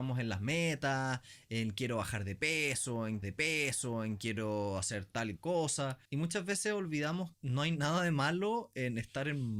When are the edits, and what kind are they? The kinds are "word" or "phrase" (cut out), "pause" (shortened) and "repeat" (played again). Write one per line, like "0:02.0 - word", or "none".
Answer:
0:03.2 - repeat
0:05.4 - word
0:06.0 - pause
0:07.3 - word